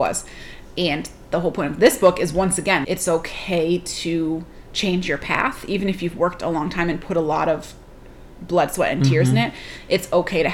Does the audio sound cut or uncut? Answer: cut